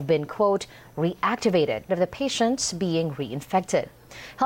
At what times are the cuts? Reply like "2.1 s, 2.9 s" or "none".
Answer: 1.9 s